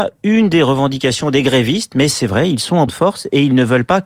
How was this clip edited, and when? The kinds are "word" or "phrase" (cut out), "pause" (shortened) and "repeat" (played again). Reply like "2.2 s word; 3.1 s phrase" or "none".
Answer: 2.9 s word